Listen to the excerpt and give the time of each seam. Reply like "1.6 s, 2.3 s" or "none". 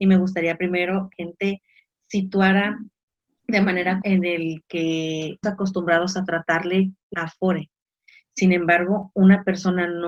1.1 s, 4.0 s, 5.4 s, 7.1 s

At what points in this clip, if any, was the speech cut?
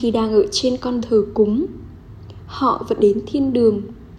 1.0 s, 3.0 s

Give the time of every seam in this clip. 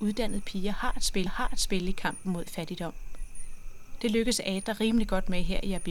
1.3 s

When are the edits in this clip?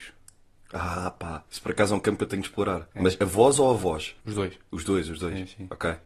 1.5 s, 2.9 s, 4.2 s

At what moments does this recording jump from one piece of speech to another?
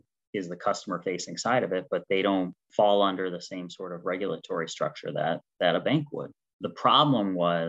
none

